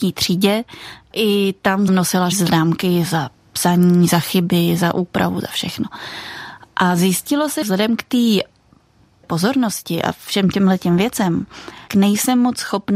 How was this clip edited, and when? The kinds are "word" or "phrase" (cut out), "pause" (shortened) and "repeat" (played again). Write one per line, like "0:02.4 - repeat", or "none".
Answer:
0:01.1 - word
0:01.9 - word
0:02.3 - word
0:07.6 - word
0:09.2 - word
0:11.9 - word